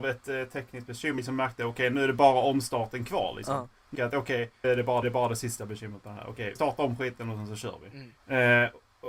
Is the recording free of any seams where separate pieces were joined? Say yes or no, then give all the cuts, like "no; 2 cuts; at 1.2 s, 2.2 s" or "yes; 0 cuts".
no; 6 cuts; at 1.2 s, 3.9 s, 4.6 s, 5.0 s, 6.6 s, 8.2 s